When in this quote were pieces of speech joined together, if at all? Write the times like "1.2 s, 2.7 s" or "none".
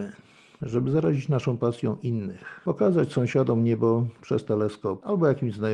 none